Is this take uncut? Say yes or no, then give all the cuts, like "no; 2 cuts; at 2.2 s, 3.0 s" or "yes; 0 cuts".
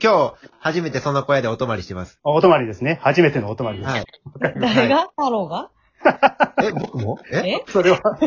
yes; 0 cuts